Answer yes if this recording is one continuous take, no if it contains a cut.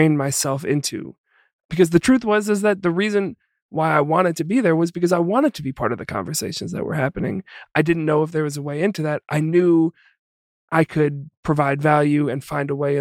yes